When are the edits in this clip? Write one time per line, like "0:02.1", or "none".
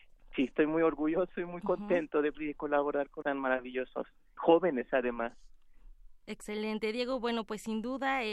0:02.3
0:03.2
0:04.4